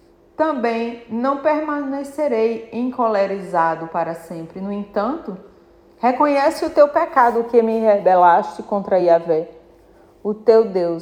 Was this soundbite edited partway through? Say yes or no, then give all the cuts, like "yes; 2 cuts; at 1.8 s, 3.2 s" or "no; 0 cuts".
no; 0 cuts